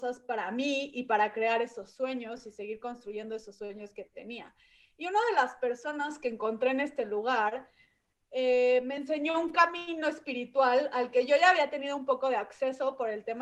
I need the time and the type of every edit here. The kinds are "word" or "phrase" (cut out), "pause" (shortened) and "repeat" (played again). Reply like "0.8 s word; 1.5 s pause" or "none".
none